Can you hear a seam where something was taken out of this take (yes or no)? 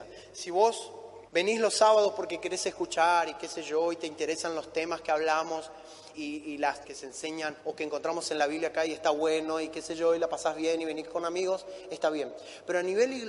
yes